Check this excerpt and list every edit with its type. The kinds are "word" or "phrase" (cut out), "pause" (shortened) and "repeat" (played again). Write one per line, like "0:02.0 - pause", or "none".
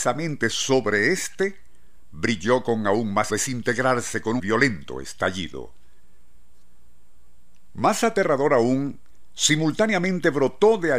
0:03.3 - phrase
0:04.4 - word